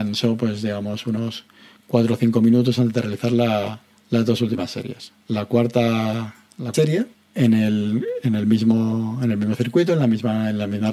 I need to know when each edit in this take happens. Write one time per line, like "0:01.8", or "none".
0:04.0
0:05.2
0:06.7
0:07.1